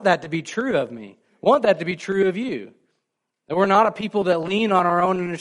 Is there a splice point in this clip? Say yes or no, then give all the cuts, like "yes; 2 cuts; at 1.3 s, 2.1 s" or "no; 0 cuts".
no; 0 cuts